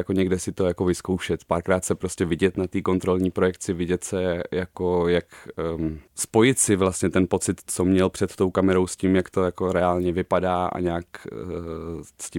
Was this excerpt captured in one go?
no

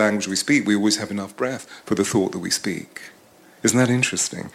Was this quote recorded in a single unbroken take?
yes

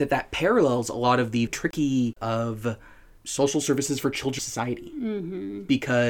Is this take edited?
yes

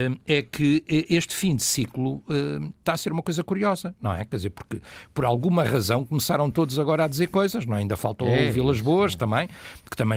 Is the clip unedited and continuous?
yes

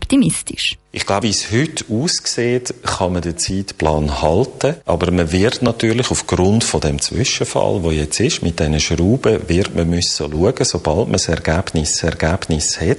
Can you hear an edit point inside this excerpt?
yes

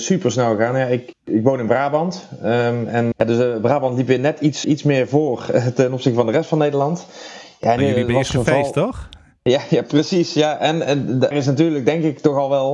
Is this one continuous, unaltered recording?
no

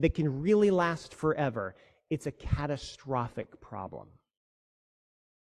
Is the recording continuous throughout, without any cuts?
yes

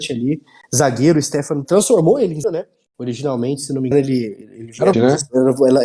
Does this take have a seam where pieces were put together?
yes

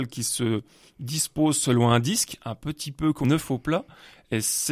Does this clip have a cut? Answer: yes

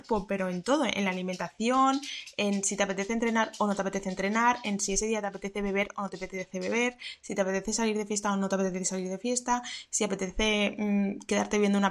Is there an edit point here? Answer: no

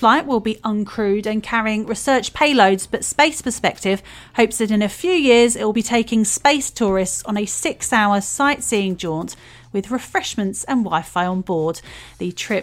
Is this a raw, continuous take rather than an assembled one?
yes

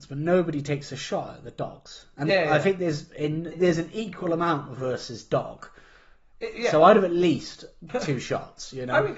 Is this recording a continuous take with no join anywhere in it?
no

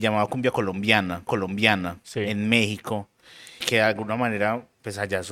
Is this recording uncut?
no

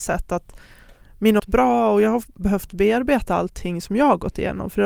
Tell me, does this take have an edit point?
yes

